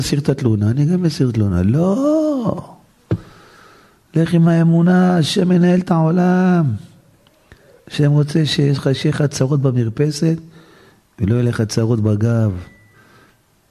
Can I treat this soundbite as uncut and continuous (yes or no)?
yes